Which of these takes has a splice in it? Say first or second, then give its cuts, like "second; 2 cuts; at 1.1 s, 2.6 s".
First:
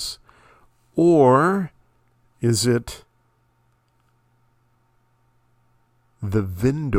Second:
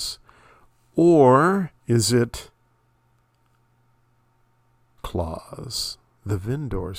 second; 2 cuts; at 1.8 s, 5.0 s